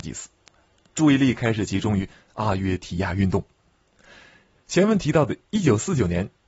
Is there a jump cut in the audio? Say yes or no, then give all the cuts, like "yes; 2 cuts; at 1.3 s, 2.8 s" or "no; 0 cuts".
no; 0 cuts